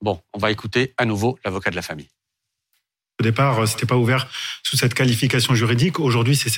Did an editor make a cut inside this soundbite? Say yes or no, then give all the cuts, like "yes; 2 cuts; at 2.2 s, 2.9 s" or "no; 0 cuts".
no; 0 cuts